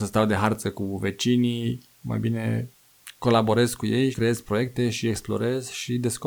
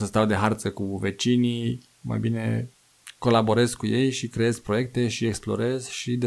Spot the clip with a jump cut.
first; 1 cut; at 4.1 s

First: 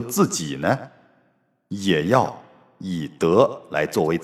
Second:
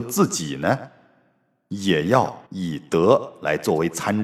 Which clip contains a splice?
second; 1 cut; at 2.5 s

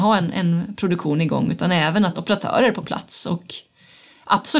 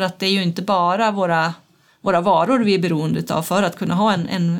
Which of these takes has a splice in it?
first; 1 cut; at 2.1 s

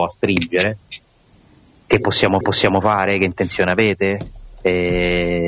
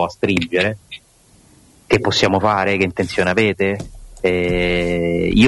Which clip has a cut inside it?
first; 1 cut; at 2.4 s

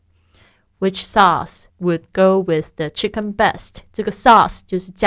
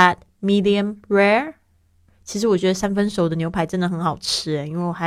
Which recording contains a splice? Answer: first; 1 cut; at 1.7 s

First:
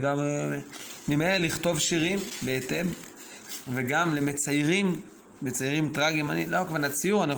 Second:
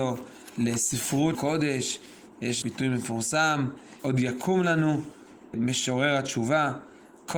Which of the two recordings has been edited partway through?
second; 4 cuts; at 1.3 s, 2.6 s, 4.0 s, 5.5 s

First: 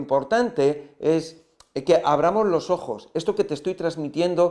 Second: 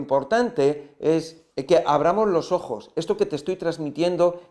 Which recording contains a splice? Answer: second; 1 cut; at 1.5 s

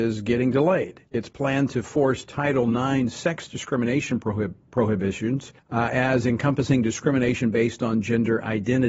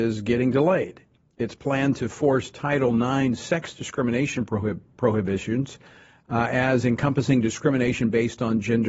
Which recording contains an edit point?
first; 2 cuts; at 1.1 s, 5.6 s

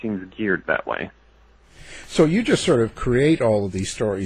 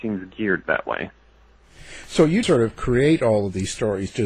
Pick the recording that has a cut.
second; 1 cut; at 2.4 s

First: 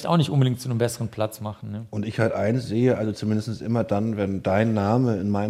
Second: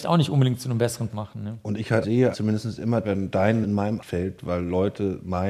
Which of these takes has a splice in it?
second; 6 cuts; at 1.1 s, 2.0 s, 2.3 s, 3.0 s, 3.6 s, 4.0 s

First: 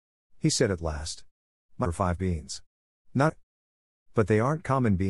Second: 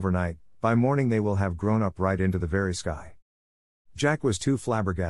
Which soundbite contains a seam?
first; 3 cuts; at 1.8 s, 2.2 s, 3.3 s

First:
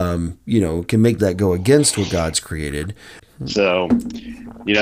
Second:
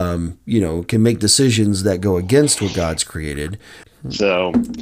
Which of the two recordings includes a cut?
first; 1 cut; at 1.2 s

